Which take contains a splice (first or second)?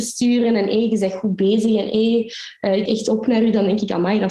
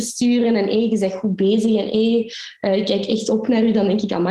first